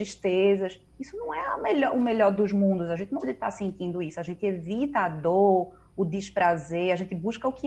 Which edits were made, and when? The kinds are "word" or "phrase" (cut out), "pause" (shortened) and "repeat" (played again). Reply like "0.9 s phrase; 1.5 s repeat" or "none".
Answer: 3.2 s word